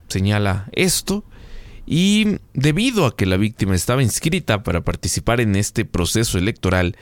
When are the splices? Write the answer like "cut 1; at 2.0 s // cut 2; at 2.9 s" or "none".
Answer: cut 1; at 2.4 s